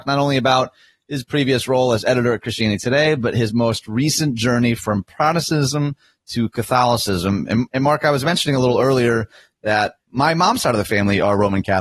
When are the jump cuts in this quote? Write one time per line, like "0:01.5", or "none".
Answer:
none